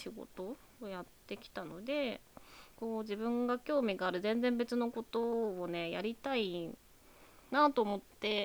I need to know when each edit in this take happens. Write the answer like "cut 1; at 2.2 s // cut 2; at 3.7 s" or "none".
cut 1; at 2.7 s